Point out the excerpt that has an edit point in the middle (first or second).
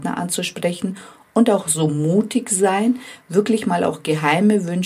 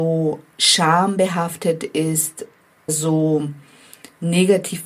second